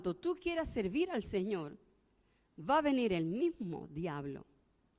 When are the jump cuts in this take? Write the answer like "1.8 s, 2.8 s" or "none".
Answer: none